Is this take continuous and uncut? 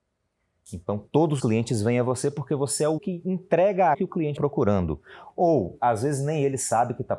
no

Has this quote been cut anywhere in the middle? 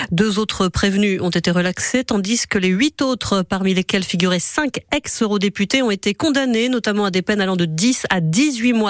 no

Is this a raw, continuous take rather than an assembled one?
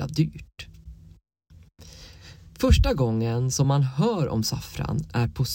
yes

